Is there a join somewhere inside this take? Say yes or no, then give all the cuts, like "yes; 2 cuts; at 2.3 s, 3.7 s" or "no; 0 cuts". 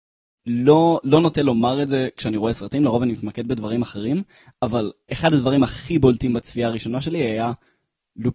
no; 0 cuts